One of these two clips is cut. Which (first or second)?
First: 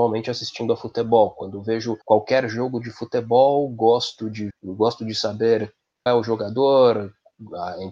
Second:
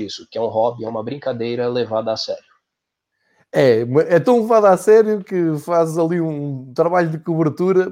first